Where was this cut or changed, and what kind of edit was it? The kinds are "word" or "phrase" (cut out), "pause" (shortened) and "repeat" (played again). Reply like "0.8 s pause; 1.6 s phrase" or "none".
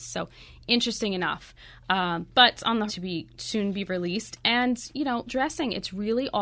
2.6 s word; 2.9 s word; 3.4 s word; 5.3 s word